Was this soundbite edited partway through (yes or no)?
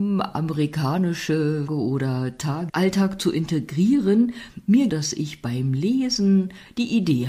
yes